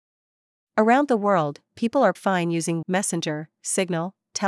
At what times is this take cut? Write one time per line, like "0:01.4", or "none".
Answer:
0:02.2
0:02.8